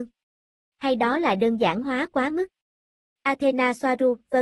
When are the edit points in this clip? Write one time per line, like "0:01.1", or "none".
none